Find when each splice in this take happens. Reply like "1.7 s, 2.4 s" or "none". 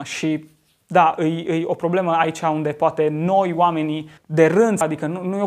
4.2 s

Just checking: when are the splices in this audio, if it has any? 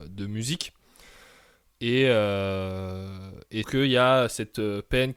3.6 s

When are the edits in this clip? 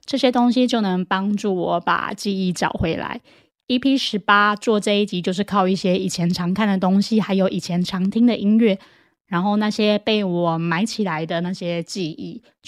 none

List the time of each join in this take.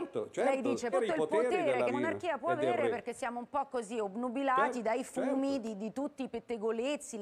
0.9 s, 1.9 s

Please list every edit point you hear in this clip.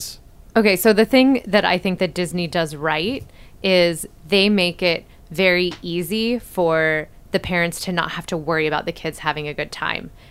none

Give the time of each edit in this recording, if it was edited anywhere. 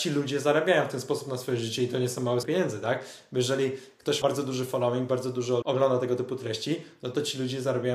2.4 s, 4.2 s, 5.6 s

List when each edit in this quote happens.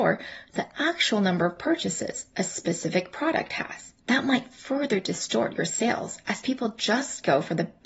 4.0 s

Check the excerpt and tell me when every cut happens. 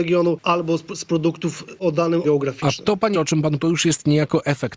2.2 s, 3.1 s, 3.6 s

